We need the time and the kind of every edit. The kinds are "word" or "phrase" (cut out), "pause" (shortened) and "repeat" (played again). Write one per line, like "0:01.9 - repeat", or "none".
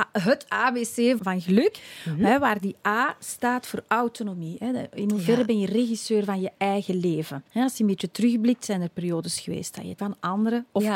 0:01.2 - word
0:07.5 - pause
0:10.0 - phrase